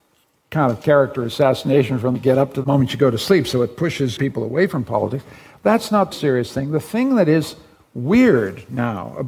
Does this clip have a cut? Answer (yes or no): yes